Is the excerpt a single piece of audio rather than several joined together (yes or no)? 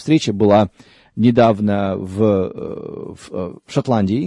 yes